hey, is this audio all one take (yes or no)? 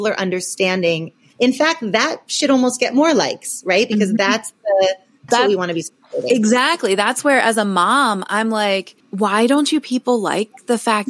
no